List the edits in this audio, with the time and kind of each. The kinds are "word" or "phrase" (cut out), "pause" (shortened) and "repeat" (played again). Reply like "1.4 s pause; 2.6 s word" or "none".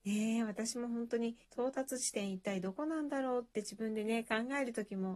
1.4 s pause